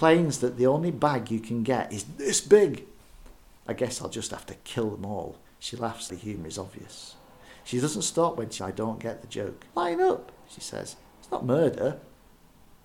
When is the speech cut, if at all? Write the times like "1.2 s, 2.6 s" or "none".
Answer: 5.4 s, 6.1 s, 8.6 s, 9.7 s